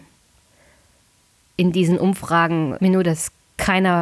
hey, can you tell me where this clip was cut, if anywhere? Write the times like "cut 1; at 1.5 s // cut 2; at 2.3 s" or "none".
cut 1; at 2.8 s